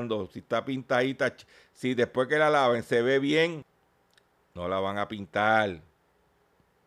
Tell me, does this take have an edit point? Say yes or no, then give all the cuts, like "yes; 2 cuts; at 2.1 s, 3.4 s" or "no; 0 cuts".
no; 0 cuts